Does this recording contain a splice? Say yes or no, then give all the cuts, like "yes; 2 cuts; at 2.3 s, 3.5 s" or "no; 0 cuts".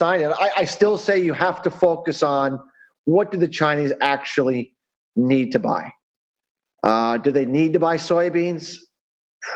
no; 0 cuts